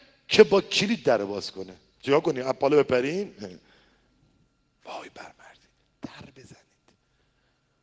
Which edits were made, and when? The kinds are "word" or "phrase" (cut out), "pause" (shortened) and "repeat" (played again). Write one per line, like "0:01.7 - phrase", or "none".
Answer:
none